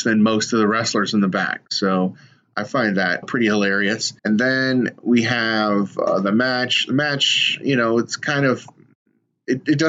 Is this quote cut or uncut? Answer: cut